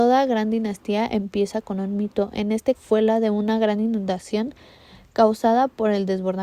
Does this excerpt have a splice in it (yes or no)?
yes